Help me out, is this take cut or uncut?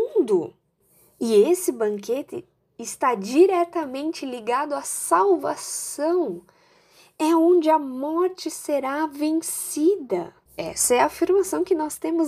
cut